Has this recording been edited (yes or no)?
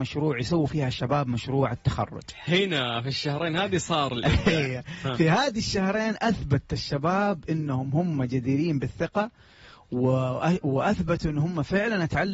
no